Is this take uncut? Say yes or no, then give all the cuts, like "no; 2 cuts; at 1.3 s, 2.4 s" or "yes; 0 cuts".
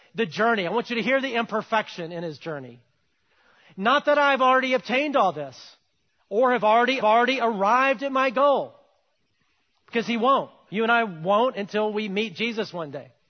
no; 1 cut; at 7.0 s